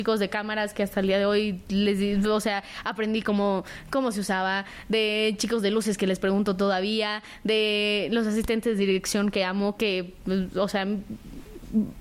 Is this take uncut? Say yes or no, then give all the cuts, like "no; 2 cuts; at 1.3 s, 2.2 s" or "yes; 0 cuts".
no; 1 cut; at 9.8 s